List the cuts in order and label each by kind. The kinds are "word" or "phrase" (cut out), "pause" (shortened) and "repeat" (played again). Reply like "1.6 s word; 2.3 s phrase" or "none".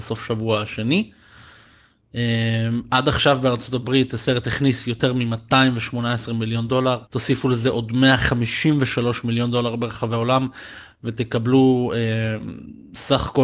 7.1 s pause

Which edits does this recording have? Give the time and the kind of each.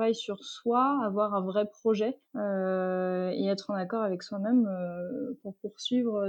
2.2 s pause

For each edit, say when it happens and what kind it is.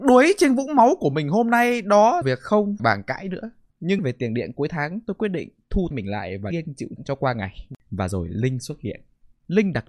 2.2 s word; 2.8 s word; 4.0 s word; 5.9 s word; 6.5 s word; 7.0 s word

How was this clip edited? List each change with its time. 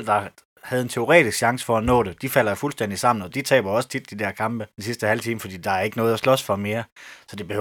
4.7 s pause

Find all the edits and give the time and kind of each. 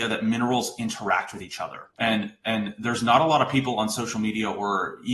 1.9 s pause

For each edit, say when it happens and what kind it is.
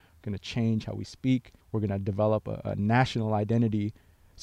1.6 s pause

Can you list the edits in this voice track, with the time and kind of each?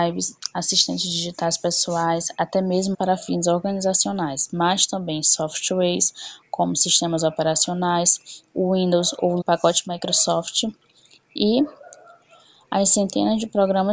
2.9 s phrase; 9.4 s word

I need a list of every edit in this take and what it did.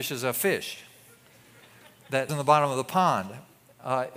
2.3 s word

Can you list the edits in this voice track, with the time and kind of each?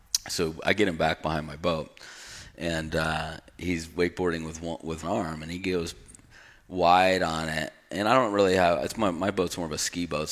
5.0 s word

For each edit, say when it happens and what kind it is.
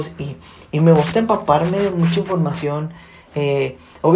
none

